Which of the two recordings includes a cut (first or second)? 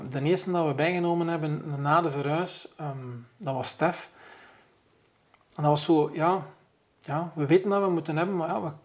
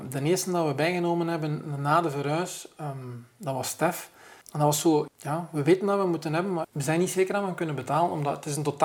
second